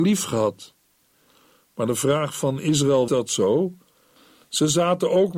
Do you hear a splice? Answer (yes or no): yes